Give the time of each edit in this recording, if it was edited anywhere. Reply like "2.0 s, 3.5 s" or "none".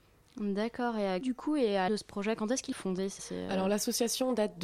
1.2 s, 1.9 s, 2.7 s, 3.2 s